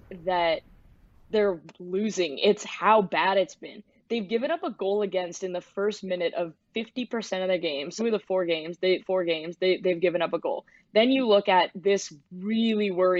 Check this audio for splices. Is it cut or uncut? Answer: cut